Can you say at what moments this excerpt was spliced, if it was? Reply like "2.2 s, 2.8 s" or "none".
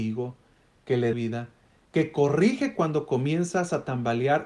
1.1 s